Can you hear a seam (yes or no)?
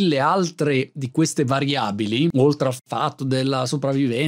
no